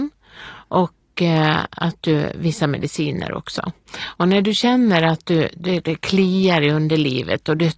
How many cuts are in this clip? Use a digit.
0